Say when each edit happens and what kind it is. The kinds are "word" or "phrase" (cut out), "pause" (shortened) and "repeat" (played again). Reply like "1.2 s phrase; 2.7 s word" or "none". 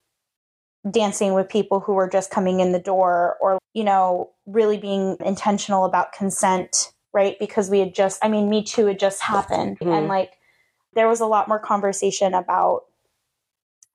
3.6 s word; 5.2 s word; 9.8 s word; 10.9 s word